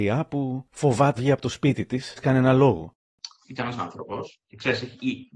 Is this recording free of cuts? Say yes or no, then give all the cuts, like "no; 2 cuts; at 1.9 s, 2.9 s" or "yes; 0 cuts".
no; 3 cuts; at 1.2 s, 2.2 s, 3.8 s